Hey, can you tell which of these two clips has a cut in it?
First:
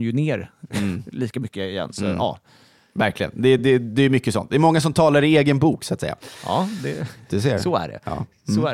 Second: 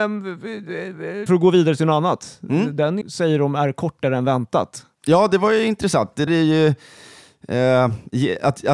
second; 3 cuts; at 1.3 s, 3.0 s, 6.3 s

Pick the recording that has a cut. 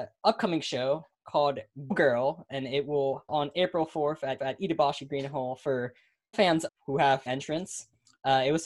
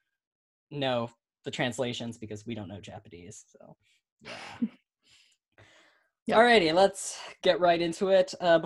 first; 6 cuts; at 1.9 s, 3.3 s, 4.4 s, 6.3 s, 6.7 s, 7.3 s

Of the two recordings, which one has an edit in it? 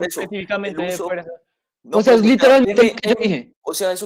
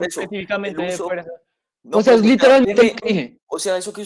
second; 1 cut; at 3.0 s

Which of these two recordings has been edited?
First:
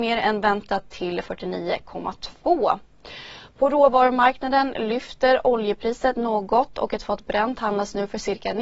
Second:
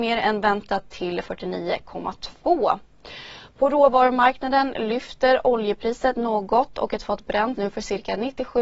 second; 1 cut; at 7.6 s

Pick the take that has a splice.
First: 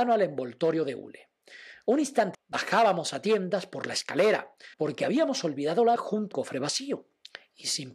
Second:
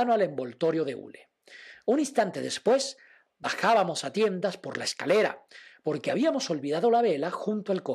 first; 4 cuts; at 2.3 s, 4.7 s, 6.0 s, 6.3 s

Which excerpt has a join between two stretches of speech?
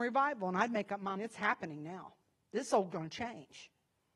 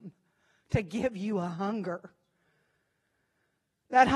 first; 2 cuts; at 1.2 s, 2.9 s

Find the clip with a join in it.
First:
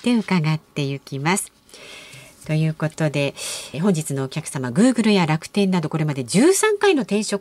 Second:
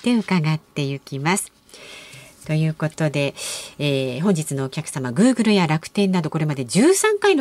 first; 1 cut; at 3.7 s

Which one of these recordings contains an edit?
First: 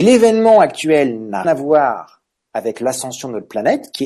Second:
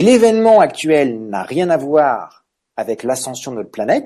first; 1 cut; at 1.4 s

